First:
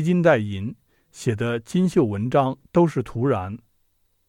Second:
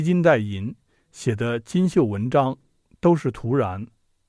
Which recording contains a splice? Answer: first; 1 cut; at 2.6 s

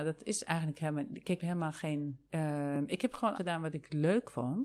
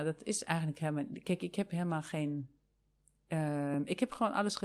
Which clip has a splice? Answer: first; 3 cuts; at 1.4 s, 2.3 s, 3.3 s

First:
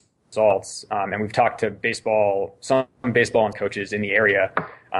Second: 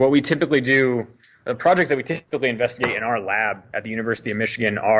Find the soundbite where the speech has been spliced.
first; 1 cut; at 3.5 s

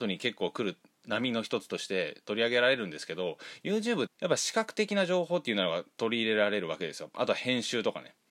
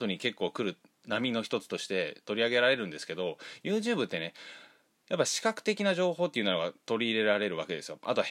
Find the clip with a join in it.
first; 1 cut; at 4.1 s

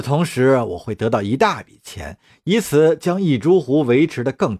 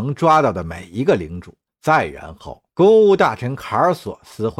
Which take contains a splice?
second; 2 cuts; at 1.7 s, 2.7 s

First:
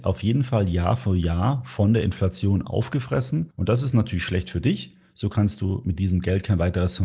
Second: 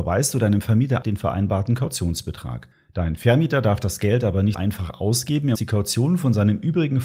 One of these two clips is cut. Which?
second; 3 cuts; at 1.0 s, 4.5 s, 5.5 s

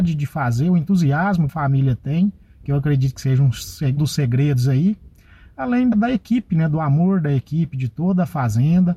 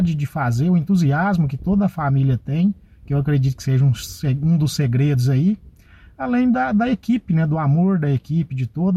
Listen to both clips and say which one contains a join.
first; 3 cuts; at 1.5 s, 4.0 s, 5.9 s

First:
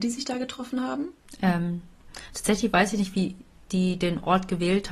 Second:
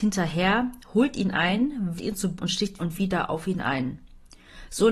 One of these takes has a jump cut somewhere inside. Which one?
second; 3 cuts; at 2.0 s, 2.4 s, 2.8 s

